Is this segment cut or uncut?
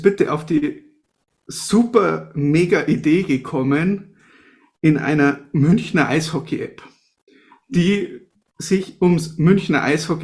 uncut